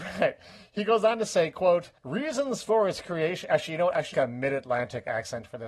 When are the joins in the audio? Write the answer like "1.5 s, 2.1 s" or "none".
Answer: 2.0 s, 4.1 s